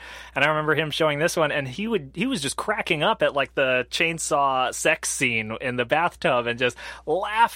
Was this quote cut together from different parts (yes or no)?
no